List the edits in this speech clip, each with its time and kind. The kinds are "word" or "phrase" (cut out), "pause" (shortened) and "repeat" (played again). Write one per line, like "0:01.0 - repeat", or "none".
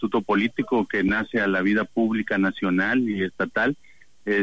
none